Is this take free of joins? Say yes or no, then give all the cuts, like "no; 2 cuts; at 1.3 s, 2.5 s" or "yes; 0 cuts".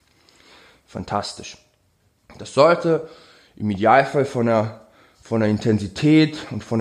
yes; 0 cuts